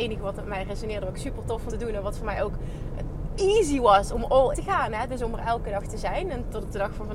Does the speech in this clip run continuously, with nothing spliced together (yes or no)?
no